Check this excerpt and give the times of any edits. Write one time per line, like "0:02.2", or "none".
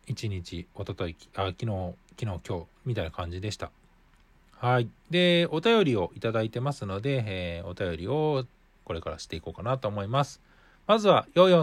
none